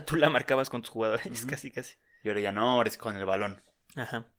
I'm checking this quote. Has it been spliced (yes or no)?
no